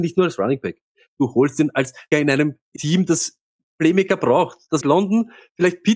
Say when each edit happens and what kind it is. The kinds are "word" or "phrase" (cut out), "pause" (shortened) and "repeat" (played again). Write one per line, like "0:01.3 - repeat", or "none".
0:02.1 - word
0:02.8 - word
0:04.8 - phrase

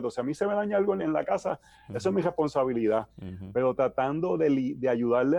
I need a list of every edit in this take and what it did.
0:01.0 - phrase
0:03.1 - pause

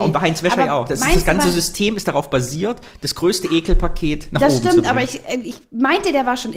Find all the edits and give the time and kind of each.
none

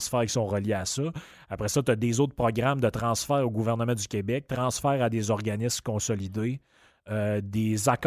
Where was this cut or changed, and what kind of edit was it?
none

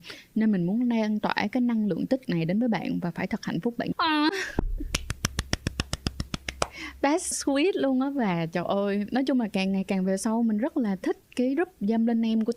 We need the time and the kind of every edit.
0:02.2 - word
0:03.9 - word
0:07.3 - word

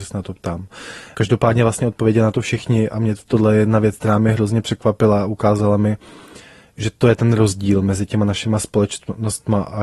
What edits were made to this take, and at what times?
none

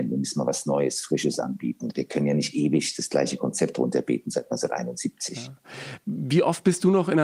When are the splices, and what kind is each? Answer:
none

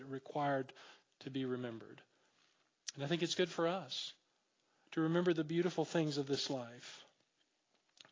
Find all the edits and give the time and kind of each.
none

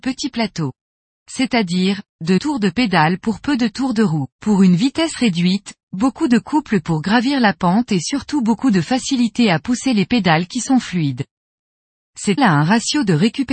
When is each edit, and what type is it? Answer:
0:02.4 - word
0:04.3 - pause
0:12.4 - word

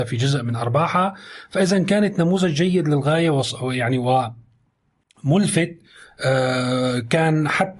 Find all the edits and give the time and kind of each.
none

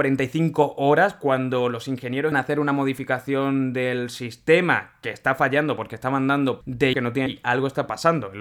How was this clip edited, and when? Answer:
0:02.3 - word
0:06.6 - phrase
0:06.9 - word
0:07.3 - phrase

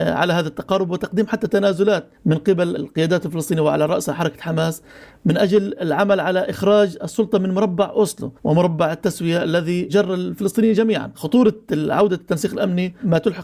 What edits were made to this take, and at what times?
0:02.2 - pause
0:08.4 - pause

